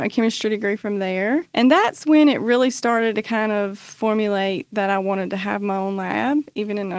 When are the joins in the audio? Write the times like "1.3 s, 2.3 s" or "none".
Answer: 1.5 s

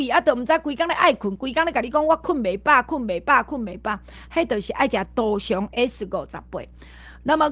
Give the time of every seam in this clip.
none

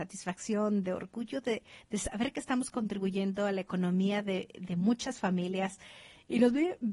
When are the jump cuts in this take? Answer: none

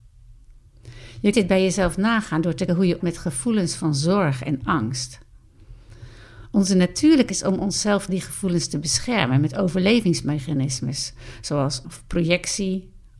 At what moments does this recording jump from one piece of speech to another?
1.3 s, 2.7 s, 3.0 s, 7.3 s, 8.1 s, 11.8 s

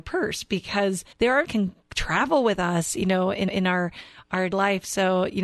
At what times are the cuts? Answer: 1.1 s, 1.4 s, 3.5 s, 4.5 s

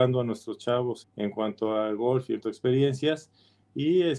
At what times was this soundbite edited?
1.0 s, 2.4 s

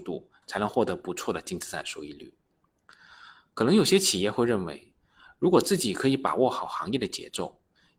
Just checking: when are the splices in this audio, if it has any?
none

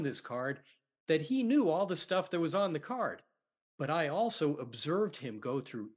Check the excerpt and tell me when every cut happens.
none

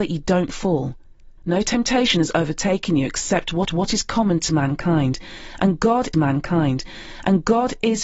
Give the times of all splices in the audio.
1.4 s, 3.7 s, 6.1 s

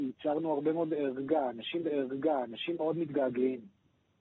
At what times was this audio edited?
1.8 s

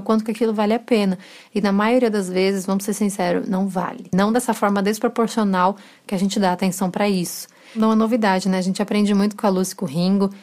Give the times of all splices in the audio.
none

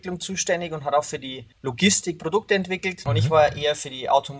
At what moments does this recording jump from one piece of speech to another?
1.5 s

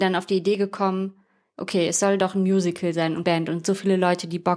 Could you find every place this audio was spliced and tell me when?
2.2 s, 3.2 s

